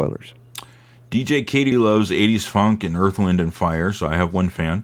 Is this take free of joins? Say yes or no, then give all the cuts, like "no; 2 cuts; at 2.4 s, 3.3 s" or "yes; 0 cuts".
no; 1 cut; at 1.7 s